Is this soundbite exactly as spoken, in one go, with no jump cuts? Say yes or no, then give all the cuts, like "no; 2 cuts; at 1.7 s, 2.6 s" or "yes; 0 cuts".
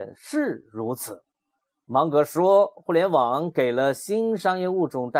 yes; 0 cuts